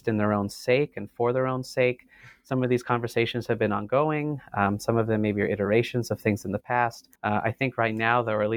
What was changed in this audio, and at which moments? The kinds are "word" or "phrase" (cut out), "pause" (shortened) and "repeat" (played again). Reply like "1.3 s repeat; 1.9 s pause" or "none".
7.1 s pause